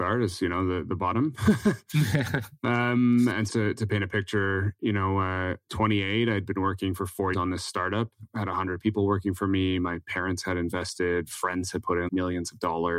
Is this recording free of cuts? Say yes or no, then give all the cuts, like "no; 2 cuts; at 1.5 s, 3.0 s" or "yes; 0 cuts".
no; 3 cuts; at 3.5 s, 7.3 s, 12.1 s